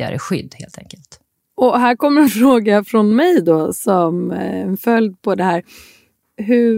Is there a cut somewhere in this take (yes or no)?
no